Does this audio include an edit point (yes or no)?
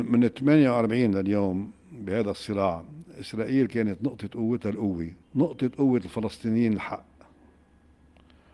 yes